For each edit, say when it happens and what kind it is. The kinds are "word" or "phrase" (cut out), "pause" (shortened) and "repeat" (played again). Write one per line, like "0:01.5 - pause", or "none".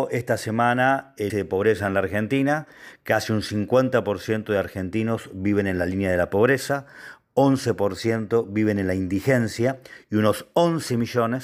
0:01.3 - word